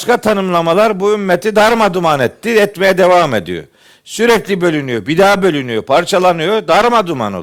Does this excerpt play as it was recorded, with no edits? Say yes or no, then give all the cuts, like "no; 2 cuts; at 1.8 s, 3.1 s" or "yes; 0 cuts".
yes; 0 cuts